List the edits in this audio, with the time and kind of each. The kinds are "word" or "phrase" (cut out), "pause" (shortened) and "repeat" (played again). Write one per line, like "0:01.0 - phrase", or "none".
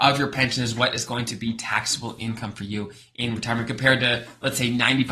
none